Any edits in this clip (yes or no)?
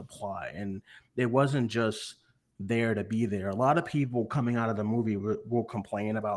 no